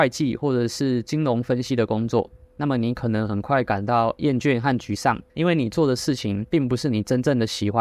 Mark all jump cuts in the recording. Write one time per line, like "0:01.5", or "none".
0:05.3